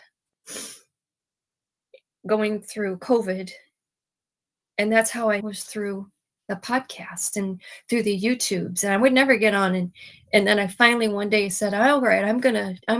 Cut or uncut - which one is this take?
cut